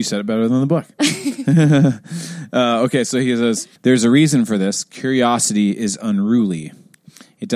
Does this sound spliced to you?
yes; 1 cut; at 3.8 s

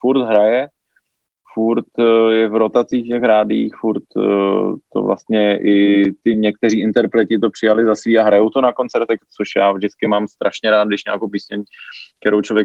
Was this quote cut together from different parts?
no; 0 cuts

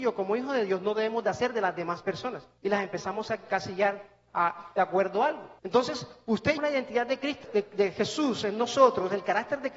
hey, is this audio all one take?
no; 4 cuts; at 2.6 s, 5.6 s, 6.6 s, 7.4 s

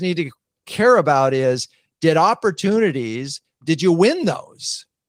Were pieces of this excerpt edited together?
no; 0 cuts

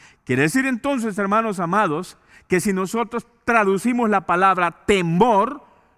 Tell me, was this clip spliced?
no; 0 cuts

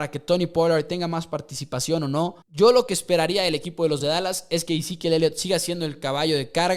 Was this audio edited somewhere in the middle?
yes; 2 cuts; at 2.4 s, 4.0 s

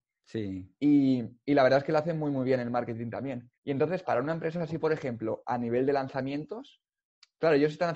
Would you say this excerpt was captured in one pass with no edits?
no; 2 cuts; at 3.6 s, 4.0 s

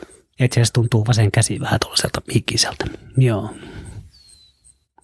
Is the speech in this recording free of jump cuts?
yes; 0 cuts

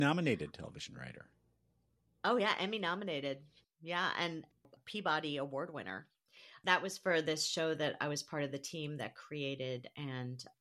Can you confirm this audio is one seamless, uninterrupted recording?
yes; 0 cuts

